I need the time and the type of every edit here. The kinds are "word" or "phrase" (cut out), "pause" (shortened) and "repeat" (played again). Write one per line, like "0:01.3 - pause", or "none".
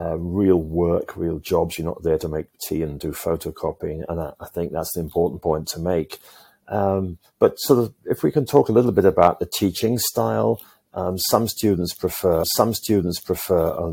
0:12.4 - repeat